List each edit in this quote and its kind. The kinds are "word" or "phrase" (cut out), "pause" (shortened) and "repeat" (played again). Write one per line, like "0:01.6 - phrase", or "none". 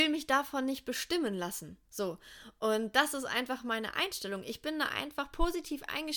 0:01.8 - pause